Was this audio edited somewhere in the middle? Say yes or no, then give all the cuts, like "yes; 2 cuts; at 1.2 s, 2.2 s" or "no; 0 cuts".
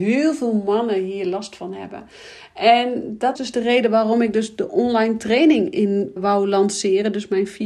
yes; 2 cuts; at 3.4 s, 6.2 s